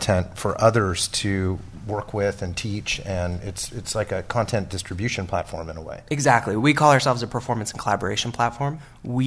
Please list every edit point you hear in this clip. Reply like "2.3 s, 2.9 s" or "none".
none